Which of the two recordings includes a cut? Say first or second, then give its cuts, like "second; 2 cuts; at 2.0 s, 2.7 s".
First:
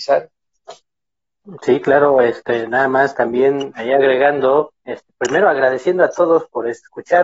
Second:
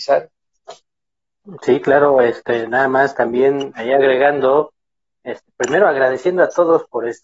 first; 1 cut; at 4.8 s